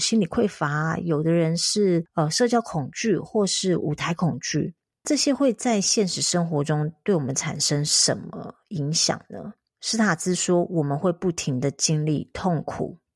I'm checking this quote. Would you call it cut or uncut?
uncut